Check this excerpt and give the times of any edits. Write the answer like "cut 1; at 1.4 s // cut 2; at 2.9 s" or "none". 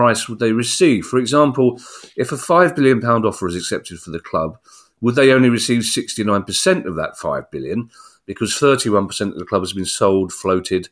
none